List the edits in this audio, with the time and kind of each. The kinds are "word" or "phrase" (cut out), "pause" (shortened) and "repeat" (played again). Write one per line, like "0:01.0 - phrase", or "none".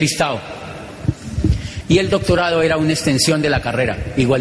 none